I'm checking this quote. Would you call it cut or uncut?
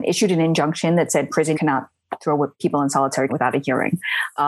cut